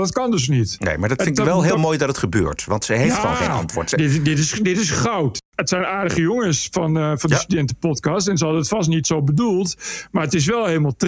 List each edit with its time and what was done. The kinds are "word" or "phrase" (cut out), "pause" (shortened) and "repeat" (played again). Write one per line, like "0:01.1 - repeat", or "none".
none